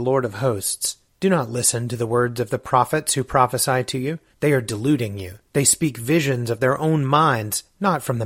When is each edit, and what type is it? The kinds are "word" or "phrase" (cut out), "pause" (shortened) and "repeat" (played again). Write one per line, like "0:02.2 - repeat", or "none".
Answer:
0:04.3 - pause
0:05.5 - pause